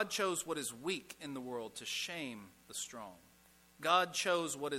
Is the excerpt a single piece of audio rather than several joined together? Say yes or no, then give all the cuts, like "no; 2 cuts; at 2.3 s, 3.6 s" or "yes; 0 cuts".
no; 1 cut; at 3.4 s